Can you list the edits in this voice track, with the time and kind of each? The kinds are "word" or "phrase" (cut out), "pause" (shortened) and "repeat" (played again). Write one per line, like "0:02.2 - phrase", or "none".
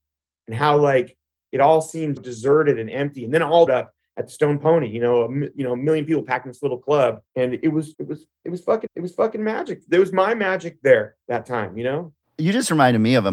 0:02.2 - word
0:03.7 - phrase
0:07.3 - pause
0:07.9 - word
0:08.9 - repeat
0:11.2 - pause